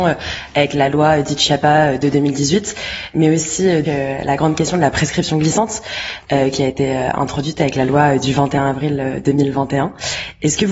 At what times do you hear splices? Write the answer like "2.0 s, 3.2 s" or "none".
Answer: 3.8 s